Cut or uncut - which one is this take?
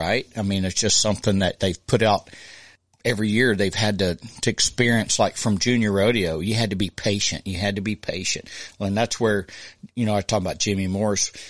uncut